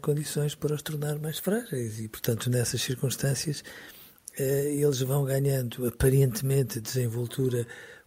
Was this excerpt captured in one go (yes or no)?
yes